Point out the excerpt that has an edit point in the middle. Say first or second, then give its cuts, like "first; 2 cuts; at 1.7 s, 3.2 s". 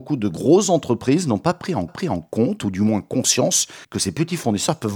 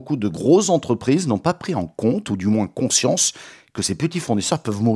first; 2 cuts; at 1.9 s, 3.8 s